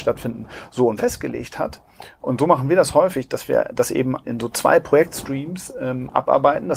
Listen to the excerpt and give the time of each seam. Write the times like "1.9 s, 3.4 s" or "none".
1.0 s, 4.2 s